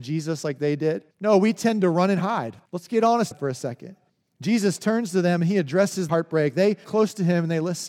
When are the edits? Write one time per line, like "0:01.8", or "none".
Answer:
0:01.1
0:02.7
0:03.3
0:04.1
0:06.1
0:06.8